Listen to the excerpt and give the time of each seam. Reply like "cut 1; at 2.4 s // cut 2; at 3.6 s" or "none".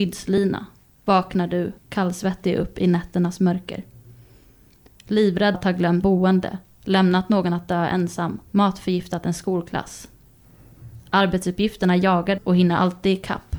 cut 1; at 1.8 s // cut 2; at 5.5 s // cut 3; at 6.0 s // cut 4; at 8.5 s // cut 5; at 12.4 s